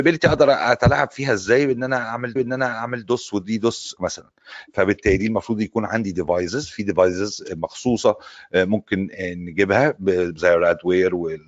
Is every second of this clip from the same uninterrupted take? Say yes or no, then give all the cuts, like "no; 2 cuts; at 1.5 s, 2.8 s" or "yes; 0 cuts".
no; 2 cuts; at 2.4 s, 4.0 s